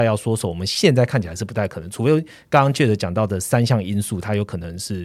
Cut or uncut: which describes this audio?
uncut